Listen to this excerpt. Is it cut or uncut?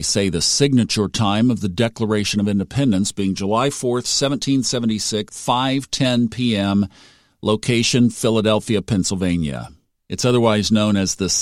cut